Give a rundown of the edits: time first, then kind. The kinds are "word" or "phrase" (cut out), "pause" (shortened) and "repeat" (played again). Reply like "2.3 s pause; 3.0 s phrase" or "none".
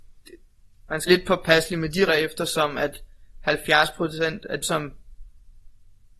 1.1 s word; 2.1 s word; 4.6 s word